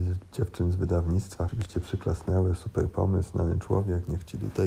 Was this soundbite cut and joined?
yes; 1 cut; at 1.5 s

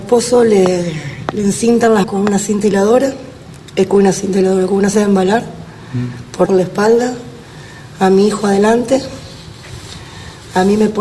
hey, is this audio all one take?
no; 3 cuts; at 2.0 s, 4.9 s, 6.5 s

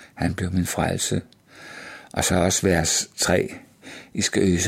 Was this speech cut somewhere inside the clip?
yes; 1 cut; at 2.3 s

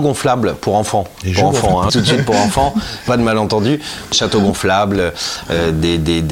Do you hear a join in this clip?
yes; 3 cuts; at 1.9 s, 3.1 s, 4.1 s

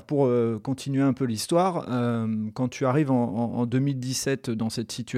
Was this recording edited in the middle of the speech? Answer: no; 0 cuts

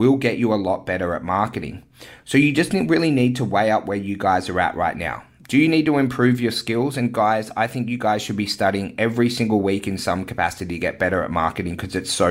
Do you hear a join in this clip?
no; 0 cuts

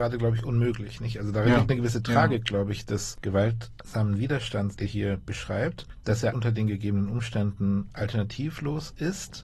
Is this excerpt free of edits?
no; 2 cuts; at 4.9 s, 6.3 s

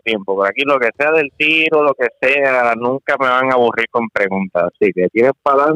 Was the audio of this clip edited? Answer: no; 0 cuts

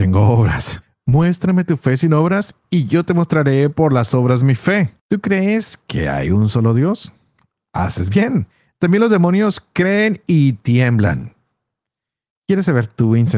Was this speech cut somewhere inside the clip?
yes; 1 cut; at 5.0 s

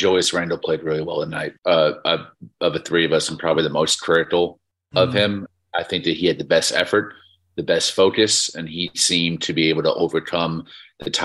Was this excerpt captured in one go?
no; 1 cut; at 1.6 s

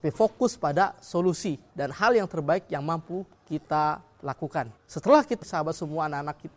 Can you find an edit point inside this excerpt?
yes; 4 cuts; at 1.7 s, 3.4 s, 4.8 s, 5.4 s

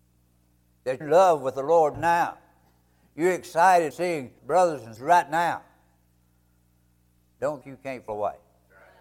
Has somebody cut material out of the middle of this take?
yes; 7 cuts; at 1.0 s, 1.9 s, 3.9 s, 4.4 s, 5.0 s, 7.6 s, 8.1 s

